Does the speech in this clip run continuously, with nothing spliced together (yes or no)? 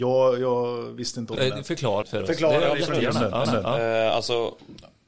no